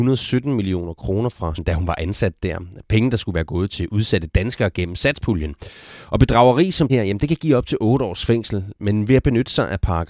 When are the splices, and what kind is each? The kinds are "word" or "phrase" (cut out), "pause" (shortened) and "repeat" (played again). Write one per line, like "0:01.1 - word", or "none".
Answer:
0:01.6 - word
0:06.9 - word